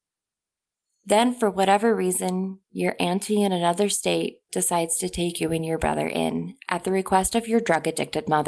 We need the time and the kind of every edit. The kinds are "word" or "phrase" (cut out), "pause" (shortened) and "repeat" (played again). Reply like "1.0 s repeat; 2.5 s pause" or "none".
none